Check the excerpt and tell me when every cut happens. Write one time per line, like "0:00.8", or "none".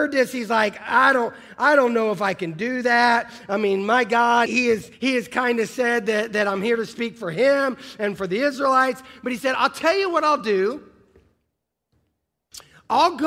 0:04.5
0:04.9

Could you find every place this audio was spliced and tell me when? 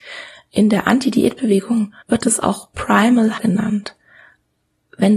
0:02.0
0:03.4

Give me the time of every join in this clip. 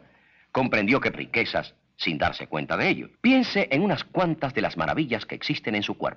0:01.1
0:03.1

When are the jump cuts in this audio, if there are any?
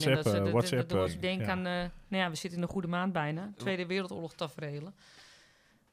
0:01.1

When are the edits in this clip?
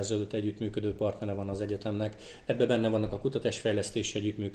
none

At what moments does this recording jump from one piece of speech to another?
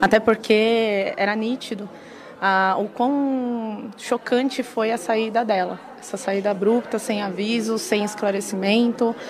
none

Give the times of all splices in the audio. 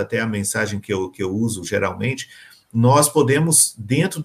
none

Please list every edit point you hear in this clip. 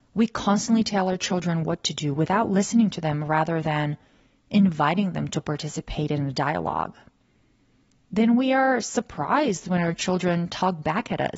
none

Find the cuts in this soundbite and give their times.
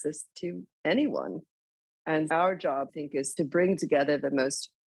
0:02.3
0:02.9
0:03.4

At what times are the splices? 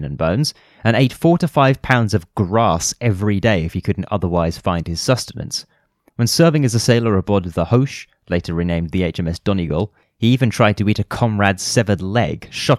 none

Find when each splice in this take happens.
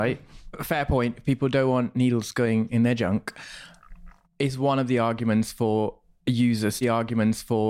0:06.8

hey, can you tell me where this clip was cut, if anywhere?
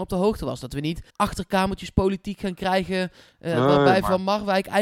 0:01.1

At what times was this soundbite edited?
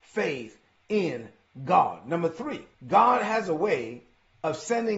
0:02.7

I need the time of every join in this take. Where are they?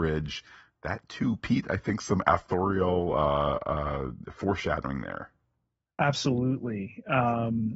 none

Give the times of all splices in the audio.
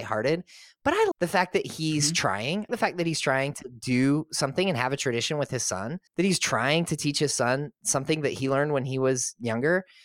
0:01.1
0:02.7
0:06.1

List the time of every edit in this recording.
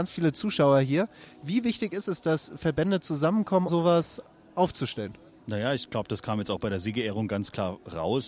0:03.7

